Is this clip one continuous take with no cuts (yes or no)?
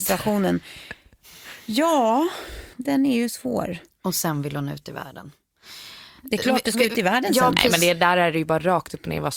no